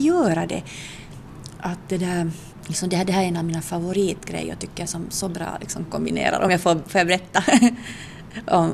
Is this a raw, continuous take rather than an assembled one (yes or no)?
yes